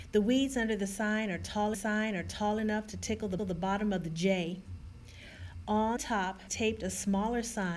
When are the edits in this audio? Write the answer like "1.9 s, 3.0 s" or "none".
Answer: 1.7 s, 3.4 s, 6.0 s, 6.5 s